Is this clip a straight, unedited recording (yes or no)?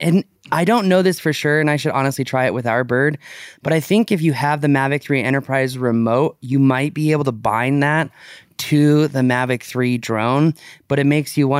yes